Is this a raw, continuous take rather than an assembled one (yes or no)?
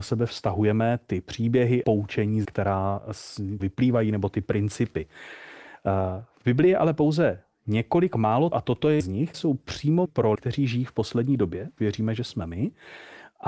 no